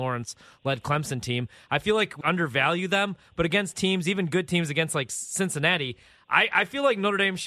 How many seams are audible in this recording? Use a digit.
1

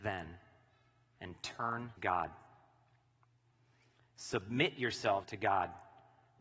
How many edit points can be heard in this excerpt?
2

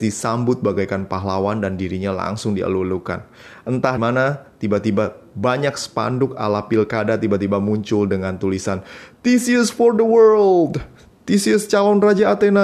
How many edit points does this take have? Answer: 1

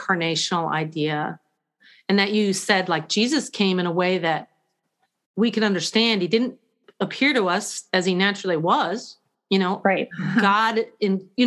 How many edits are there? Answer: 0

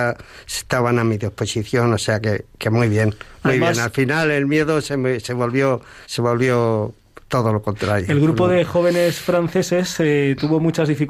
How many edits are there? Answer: 2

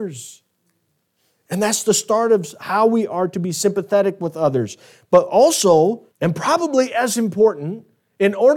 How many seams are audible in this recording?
1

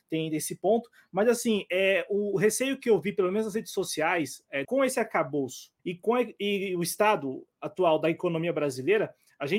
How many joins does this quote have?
2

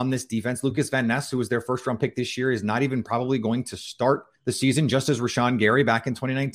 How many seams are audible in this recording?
1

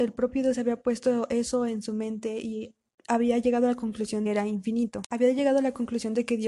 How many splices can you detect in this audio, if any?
2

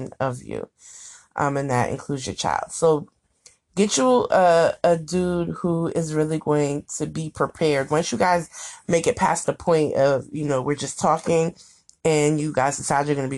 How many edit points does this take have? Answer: 0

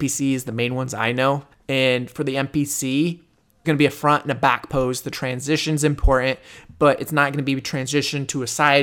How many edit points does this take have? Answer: 2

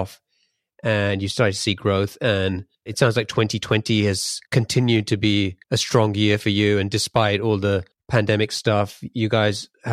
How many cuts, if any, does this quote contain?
4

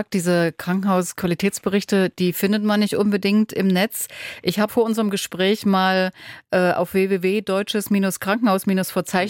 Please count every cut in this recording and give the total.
1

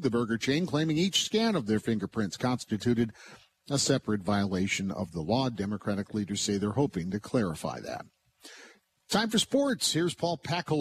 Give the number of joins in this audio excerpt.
0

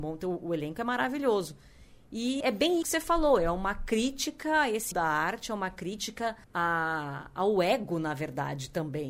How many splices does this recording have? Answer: 4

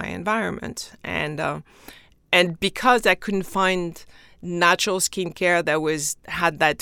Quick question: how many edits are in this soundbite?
0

